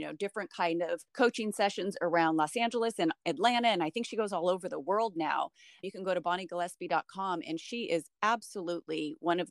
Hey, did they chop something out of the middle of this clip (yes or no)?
yes